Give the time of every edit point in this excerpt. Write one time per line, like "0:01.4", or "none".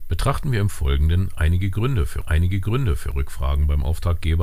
0:02.2

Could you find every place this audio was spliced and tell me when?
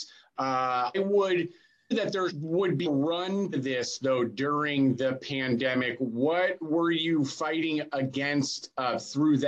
0:00.9
0:01.9
0:02.3
0:02.9
0:03.5

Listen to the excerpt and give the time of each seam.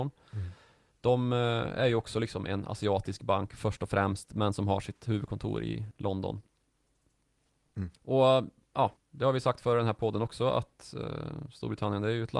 0:08.0
0:09.0

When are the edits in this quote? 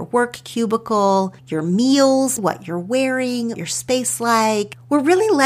0:01.4
0:02.4
0:03.5
0:04.2

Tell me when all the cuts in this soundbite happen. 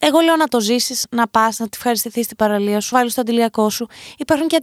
0:02.9

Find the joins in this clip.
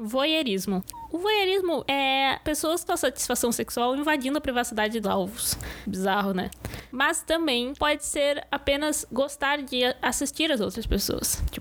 0:02.9
0:05.0

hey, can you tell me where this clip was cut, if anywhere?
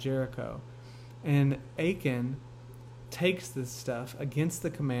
0:01.8

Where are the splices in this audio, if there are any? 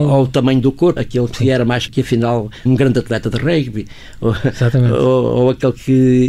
0:01.0
0:01.9
0:02.7

